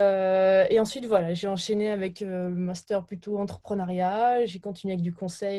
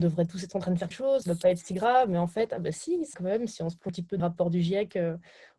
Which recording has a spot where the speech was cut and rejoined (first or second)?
second